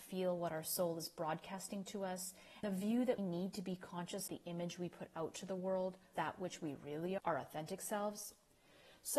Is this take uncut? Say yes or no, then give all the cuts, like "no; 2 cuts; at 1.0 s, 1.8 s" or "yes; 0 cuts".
no; 5 cuts; at 2.6 s, 3.2 s, 4.3 s, 6.1 s, 7.2 s